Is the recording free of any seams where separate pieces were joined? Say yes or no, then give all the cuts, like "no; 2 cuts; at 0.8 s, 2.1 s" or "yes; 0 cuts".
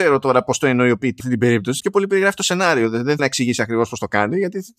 no; 3 cuts; at 1.2 s, 1.8 s, 3.2 s